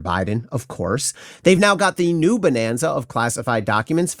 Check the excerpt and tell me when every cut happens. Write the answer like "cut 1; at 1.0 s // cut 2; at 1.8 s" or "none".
none